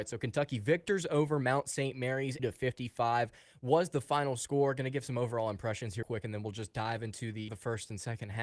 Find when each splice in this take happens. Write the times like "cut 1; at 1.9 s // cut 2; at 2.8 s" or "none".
cut 1; at 2.4 s // cut 2; at 6.0 s // cut 3; at 7.5 s